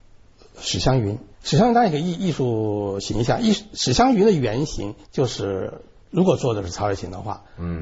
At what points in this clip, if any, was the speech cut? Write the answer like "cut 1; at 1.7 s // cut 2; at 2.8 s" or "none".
cut 1; at 1.3 s // cut 2; at 5.0 s // cut 3; at 6.0 s